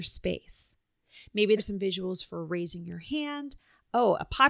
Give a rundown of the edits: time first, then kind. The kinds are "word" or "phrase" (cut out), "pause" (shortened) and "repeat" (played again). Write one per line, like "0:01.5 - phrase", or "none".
0:01.6 - word